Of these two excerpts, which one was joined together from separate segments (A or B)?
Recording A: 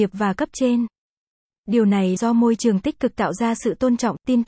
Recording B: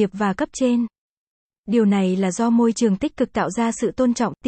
A